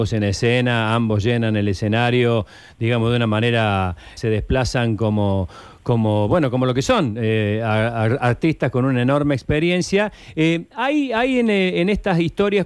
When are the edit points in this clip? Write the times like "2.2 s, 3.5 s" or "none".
4.2 s

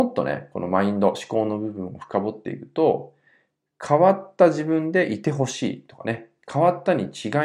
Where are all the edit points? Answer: none

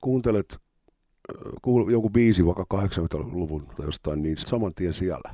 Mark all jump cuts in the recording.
3.8 s, 4.4 s

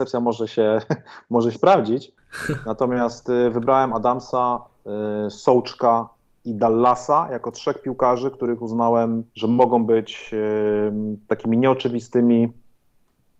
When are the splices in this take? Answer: 1.5 s, 9.3 s

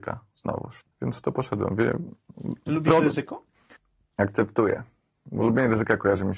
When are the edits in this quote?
none

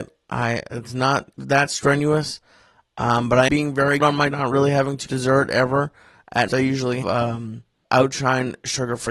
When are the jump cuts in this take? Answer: 1.4 s, 3.5 s, 4.0 s, 4.3 s, 5.1 s, 6.5 s, 7.0 s, 7.8 s

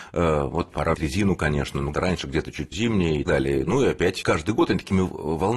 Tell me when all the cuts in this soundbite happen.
0.9 s, 1.9 s, 2.7 s, 3.3 s, 4.2 s

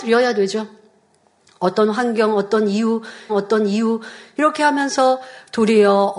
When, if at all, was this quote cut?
3.3 s

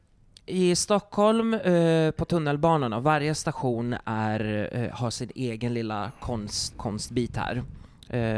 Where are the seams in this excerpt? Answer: 6.7 s

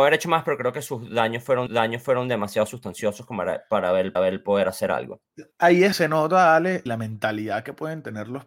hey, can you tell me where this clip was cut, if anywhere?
1.7 s, 4.2 s, 5.5 s, 5.9 s, 6.9 s

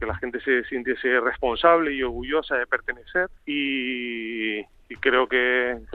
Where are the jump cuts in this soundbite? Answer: 3.4 s

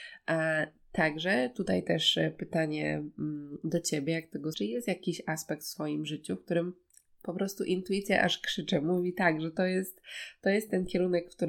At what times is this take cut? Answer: 4.5 s, 6.9 s

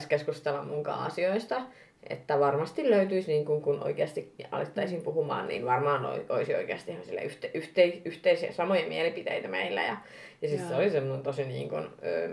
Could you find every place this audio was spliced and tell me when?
none

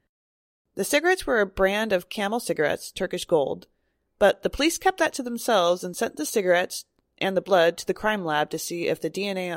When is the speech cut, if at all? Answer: none

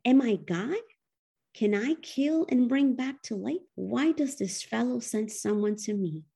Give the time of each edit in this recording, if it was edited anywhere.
3.7 s

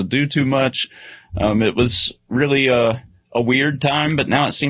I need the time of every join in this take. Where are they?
none

